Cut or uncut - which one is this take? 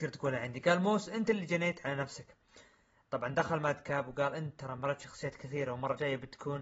uncut